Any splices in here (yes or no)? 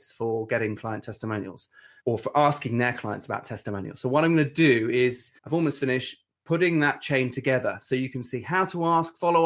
yes